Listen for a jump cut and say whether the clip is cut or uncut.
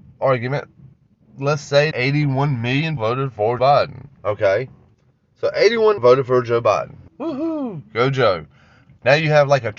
cut